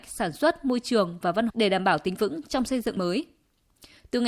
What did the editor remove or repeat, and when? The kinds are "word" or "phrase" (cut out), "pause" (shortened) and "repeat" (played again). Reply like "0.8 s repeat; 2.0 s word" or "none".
1.5 s word; 2.1 s word; 3.0 s phrase